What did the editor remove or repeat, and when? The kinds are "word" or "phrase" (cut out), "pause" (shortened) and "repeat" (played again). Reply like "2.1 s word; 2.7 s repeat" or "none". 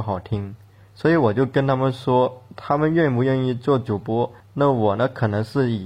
4.4 s pause